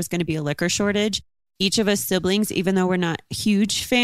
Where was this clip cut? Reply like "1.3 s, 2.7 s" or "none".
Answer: none

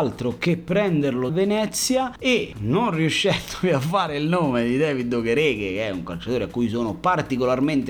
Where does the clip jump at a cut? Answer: 1.3 s

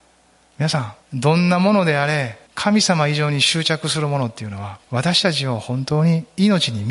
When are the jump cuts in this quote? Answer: 1.0 s, 2.5 s, 4.8 s

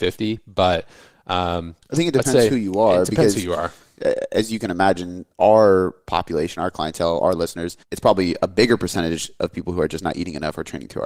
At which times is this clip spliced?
1.8 s, 7.8 s

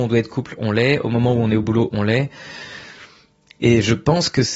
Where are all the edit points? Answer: none

